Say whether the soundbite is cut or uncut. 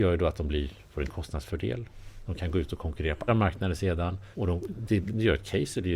cut